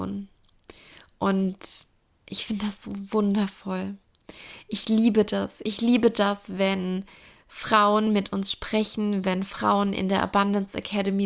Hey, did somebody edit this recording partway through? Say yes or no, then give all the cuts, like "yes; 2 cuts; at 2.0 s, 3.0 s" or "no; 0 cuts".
no; 0 cuts